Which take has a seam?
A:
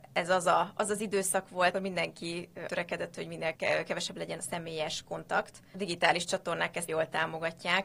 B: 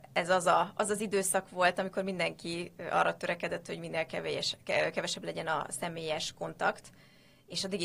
A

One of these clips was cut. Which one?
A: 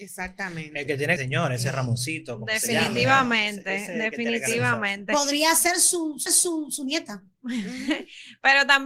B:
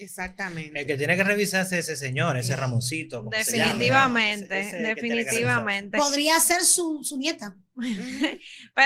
A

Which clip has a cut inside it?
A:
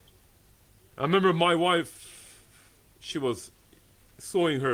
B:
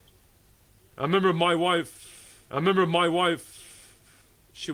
B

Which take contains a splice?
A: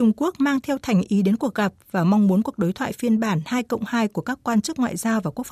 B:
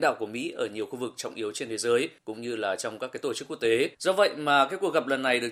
B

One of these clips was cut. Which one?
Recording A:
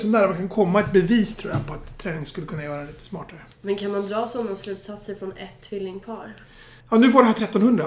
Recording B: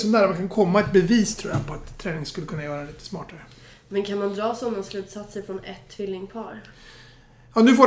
A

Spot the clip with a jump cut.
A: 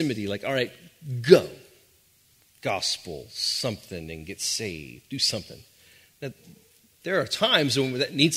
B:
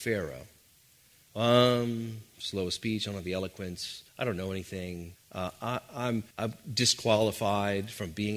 B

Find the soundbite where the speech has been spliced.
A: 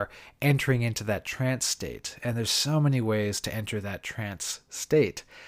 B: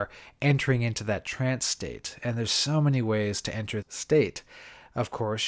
B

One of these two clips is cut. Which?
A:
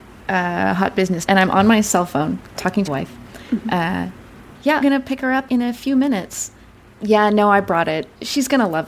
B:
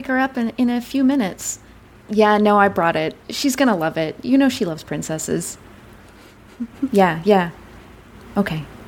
A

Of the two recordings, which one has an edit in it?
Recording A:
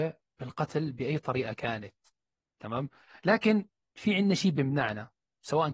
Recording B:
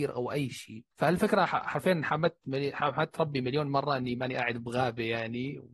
B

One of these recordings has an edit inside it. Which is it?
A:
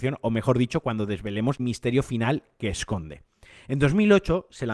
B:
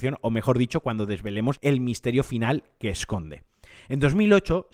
A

